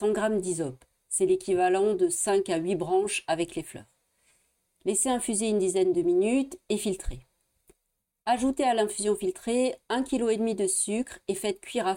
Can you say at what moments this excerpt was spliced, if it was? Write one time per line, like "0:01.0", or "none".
none